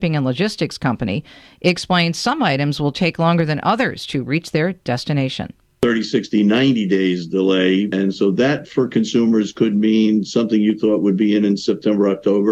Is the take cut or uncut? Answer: uncut